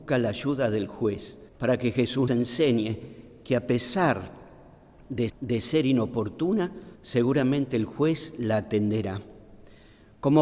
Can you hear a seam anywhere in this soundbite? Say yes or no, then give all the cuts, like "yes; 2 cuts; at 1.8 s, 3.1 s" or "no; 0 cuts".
yes; 4 cuts; at 1.5 s, 2.3 s, 5.3 s, 7.0 s